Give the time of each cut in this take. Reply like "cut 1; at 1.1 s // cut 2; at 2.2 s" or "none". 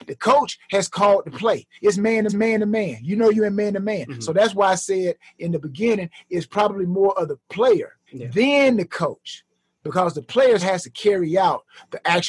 cut 1; at 2.3 s // cut 2; at 8.1 s // cut 3; at 10.6 s

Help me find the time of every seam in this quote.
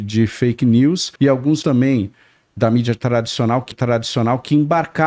cut 1; at 1.2 s // cut 2; at 1.6 s // cut 3; at 3.7 s

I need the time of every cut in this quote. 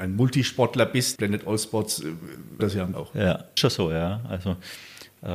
cut 1; at 1.2 s // cut 2; at 2.6 s // cut 3; at 2.9 s // cut 4; at 3.6 s

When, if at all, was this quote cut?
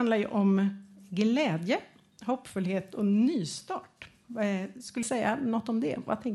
cut 1; at 5.0 s

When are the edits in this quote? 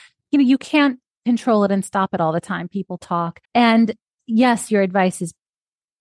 cut 1; at 3.5 s

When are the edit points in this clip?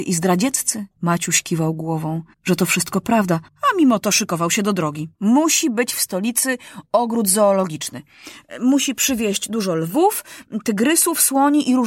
cut 1; at 0.9 s // cut 2; at 2.3 s // cut 3; at 3.5 s // cut 4; at 5.1 s

